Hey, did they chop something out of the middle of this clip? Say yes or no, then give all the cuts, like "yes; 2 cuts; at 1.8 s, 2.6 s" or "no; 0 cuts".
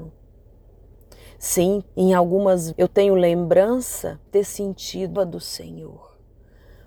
yes; 4 cuts; at 1.9 s, 2.7 s, 4.3 s, 5.2 s